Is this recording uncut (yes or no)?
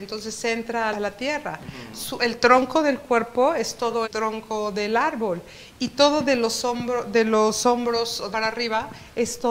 no